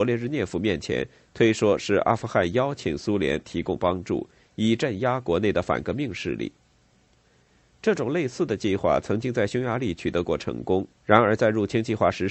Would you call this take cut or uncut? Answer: cut